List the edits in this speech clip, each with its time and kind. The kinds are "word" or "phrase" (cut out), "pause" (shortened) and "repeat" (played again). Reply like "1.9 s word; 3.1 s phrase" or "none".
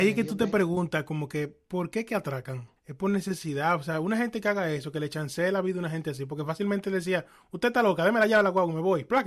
2.8 s pause